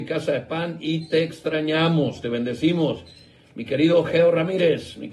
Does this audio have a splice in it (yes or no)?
no